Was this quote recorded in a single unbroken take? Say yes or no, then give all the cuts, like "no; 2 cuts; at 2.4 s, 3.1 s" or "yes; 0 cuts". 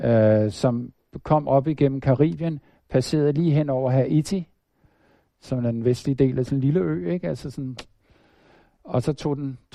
yes; 0 cuts